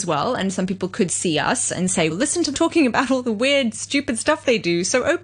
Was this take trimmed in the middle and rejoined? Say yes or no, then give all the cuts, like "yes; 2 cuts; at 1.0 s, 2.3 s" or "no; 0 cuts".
yes; 2 cuts; at 2.1 s, 2.5 s